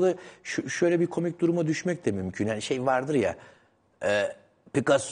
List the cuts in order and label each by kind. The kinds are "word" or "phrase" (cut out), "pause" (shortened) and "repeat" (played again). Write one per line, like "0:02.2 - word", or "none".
none